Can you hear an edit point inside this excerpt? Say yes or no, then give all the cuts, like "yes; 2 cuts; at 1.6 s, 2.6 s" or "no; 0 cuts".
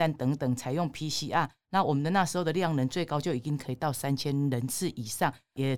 no; 0 cuts